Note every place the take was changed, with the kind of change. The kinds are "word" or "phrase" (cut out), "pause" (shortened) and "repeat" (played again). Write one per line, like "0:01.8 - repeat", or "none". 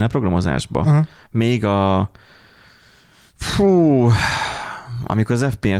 none